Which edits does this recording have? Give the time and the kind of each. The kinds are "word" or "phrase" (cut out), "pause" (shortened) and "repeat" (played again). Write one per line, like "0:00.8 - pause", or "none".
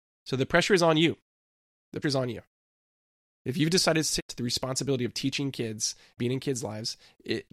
0:02.0 - word
0:04.2 - word
0:06.2 - word